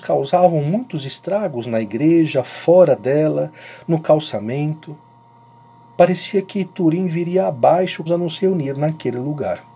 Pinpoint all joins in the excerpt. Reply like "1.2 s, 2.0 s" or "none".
8.1 s